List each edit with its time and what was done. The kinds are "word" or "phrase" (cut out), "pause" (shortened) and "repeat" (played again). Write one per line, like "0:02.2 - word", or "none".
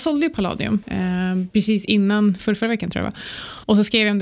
0:02.4 - word